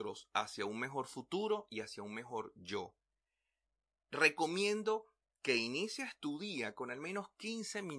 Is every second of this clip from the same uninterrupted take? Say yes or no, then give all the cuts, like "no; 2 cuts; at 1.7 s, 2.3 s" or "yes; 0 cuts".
yes; 0 cuts